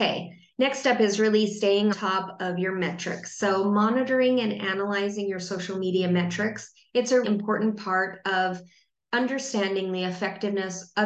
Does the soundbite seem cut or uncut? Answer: cut